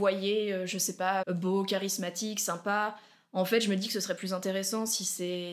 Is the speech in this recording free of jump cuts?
no; 2 cuts; at 1.2 s, 4.2 s

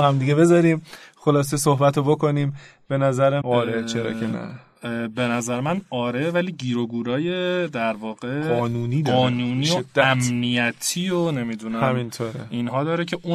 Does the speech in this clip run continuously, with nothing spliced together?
no; 1 cut; at 3.4 s

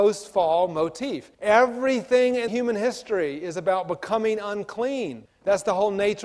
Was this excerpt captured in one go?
no; 3 cuts; at 1.3 s, 2.5 s, 5.3 s

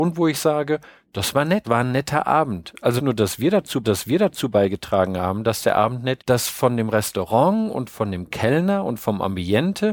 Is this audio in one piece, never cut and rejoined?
no; 4 cuts; at 1.6 s, 3.0 s, 3.8 s, 6.2 s

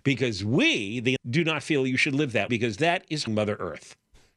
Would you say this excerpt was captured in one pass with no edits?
no; 3 cuts; at 1.2 s, 2.5 s, 3.3 s

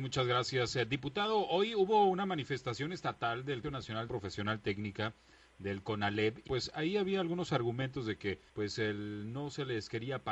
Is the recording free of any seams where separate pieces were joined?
no; 4 cuts; at 3.6 s, 4.1 s, 6.5 s, 8.5 s

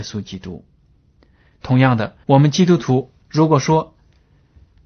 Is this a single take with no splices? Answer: no; 2 cuts; at 2.2 s, 3.2 s

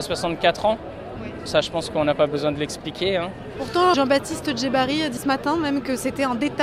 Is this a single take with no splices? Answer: no; 3 cuts; at 1.5 s, 3.9 s, 5.2 s

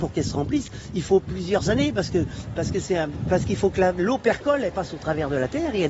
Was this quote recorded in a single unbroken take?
yes; 0 cuts

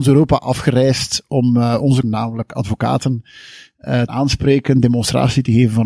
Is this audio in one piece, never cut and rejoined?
no; 2 cuts; at 2.0 s, 4.1 s

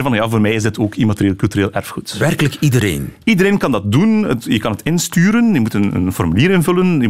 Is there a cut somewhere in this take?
no; 0 cuts

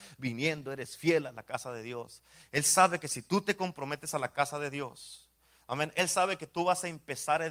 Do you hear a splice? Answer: no; 0 cuts

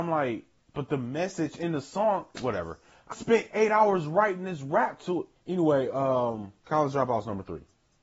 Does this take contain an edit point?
yes; 4 cuts; at 2.3 s, 3.1 s, 5.4 s, 6.6 s

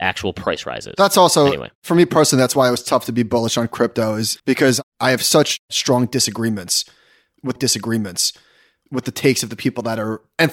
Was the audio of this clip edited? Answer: yes; 2 cuts; at 4.4 s, 7.6 s

